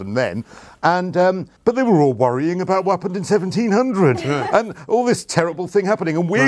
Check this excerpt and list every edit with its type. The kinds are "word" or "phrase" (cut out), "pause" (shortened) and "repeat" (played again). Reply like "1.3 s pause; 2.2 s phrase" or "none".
1.6 s pause